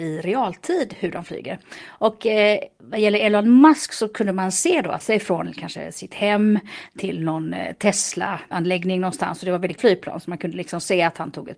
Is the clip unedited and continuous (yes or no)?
no